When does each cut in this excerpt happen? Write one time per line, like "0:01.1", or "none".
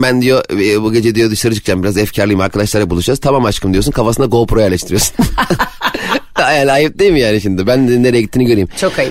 none